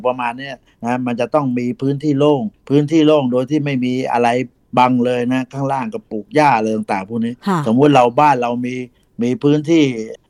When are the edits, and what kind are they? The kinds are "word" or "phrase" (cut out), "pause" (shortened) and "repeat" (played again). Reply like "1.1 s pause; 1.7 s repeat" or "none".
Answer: none